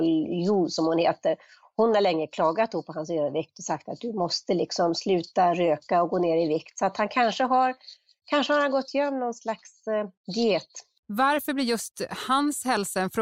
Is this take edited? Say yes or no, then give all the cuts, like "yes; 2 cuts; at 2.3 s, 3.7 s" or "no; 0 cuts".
no; 0 cuts